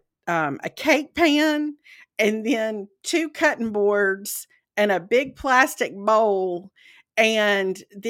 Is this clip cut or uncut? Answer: uncut